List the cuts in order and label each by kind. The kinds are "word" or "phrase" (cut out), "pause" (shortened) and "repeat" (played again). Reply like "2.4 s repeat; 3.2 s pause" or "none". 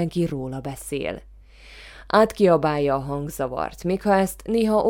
none